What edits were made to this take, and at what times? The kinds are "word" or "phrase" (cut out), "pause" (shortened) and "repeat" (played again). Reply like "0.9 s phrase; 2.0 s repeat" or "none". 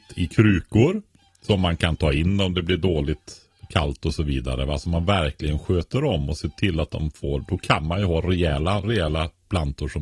8.8 s word